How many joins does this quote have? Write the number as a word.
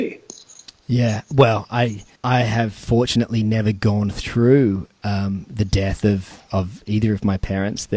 one